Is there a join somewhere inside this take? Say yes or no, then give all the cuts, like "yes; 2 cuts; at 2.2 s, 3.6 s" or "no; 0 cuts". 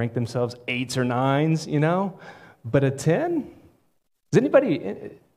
no; 0 cuts